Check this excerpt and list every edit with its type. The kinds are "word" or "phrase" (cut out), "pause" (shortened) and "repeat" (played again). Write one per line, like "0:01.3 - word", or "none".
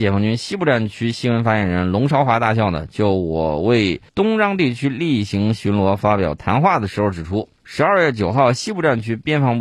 0:04.1 - pause
0:07.6 - pause

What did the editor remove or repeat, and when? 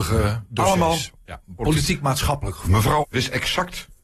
0:02.6 - phrase
0:03.0 - word

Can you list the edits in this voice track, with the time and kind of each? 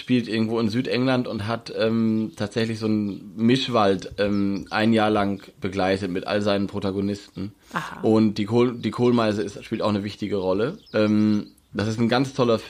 0:07.6 - pause
0:10.9 - pause

